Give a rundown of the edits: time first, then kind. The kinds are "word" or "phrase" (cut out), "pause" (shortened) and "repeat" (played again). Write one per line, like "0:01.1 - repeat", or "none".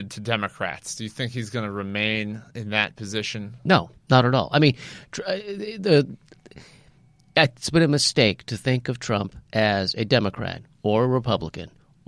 0:04.0 - pause
0:09.4 - pause

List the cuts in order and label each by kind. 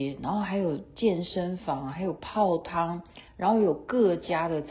0:03.3 - pause

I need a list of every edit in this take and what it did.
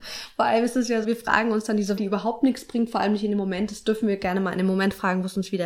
0:01.0 - word
0:02.0 - word

